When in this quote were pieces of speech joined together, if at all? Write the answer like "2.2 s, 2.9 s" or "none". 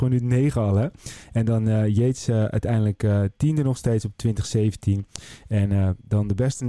none